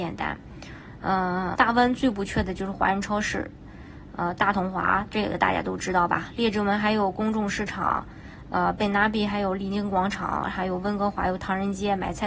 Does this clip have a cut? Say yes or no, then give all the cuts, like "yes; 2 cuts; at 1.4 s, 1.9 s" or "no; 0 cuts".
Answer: yes; 1 cut; at 1.6 s